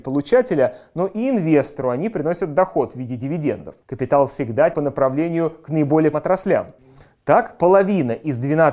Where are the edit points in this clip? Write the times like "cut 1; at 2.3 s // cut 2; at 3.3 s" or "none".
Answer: cut 1; at 3.8 s // cut 2; at 4.7 s // cut 3; at 6.1 s